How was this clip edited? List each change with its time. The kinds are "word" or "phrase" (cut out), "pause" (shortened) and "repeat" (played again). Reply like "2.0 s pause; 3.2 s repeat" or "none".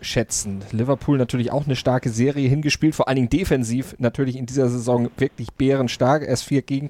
none